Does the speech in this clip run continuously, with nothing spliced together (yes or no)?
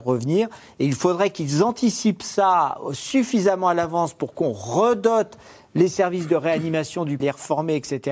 no